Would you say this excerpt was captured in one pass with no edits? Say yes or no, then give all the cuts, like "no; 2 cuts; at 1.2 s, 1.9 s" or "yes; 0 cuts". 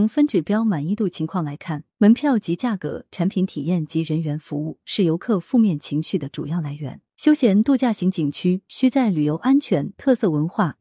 no; 2 cuts; at 1.9 s, 7.1 s